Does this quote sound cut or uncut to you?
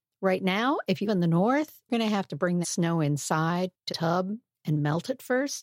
cut